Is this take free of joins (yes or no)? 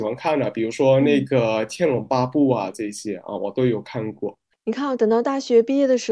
yes